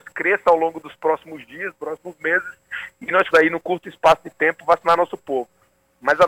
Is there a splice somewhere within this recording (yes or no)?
yes